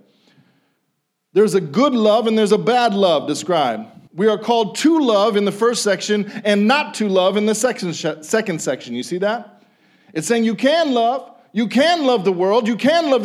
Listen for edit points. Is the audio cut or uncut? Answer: cut